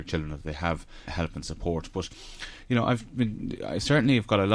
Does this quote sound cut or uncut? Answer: cut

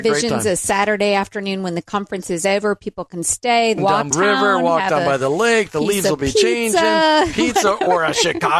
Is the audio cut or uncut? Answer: cut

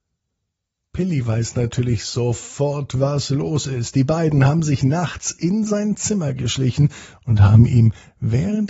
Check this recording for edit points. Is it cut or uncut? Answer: uncut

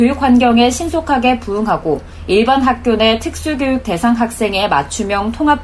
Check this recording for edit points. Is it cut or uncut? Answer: uncut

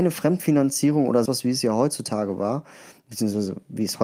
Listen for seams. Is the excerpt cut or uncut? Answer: cut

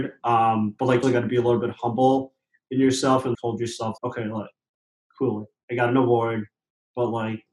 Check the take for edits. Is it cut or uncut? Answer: cut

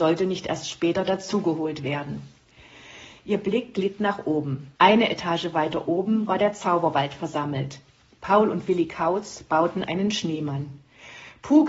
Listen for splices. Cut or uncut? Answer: cut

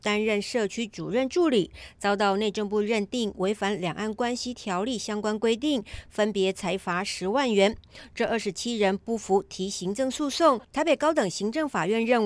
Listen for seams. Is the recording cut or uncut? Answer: cut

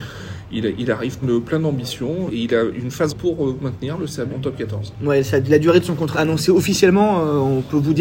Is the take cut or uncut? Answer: cut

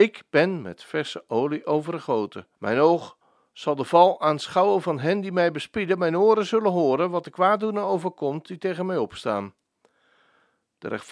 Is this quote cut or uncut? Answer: cut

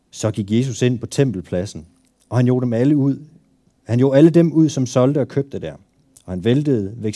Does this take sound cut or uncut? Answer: uncut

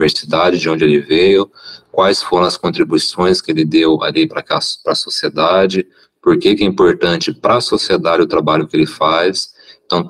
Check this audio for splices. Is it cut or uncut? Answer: uncut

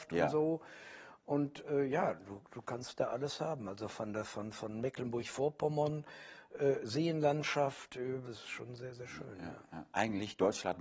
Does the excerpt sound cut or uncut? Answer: cut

